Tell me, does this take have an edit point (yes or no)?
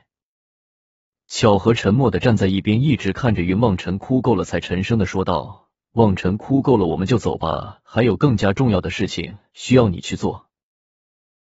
no